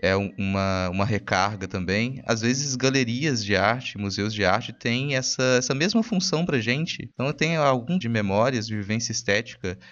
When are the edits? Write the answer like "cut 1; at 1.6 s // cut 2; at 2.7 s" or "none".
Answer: cut 1; at 8.0 s